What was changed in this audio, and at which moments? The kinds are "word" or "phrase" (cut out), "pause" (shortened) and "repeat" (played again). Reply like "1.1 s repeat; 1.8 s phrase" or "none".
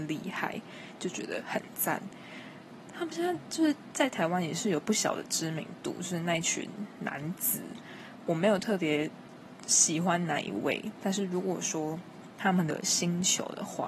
none